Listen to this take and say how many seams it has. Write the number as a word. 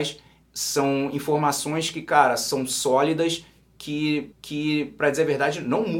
one